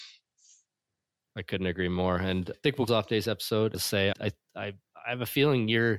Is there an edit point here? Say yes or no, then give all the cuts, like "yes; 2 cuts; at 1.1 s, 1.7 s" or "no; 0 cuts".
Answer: yes; 4 cuts; at 2.5 s, 2.9 s, 3.7 s, 4.1 s